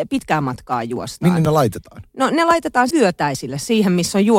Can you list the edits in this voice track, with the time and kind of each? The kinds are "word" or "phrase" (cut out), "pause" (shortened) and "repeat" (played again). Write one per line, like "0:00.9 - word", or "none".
0:02.9 - word